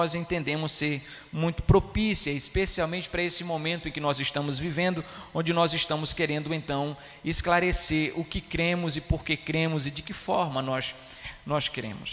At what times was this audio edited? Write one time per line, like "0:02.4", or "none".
none